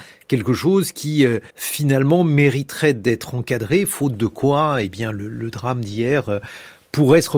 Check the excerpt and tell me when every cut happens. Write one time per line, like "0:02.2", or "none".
0:01.5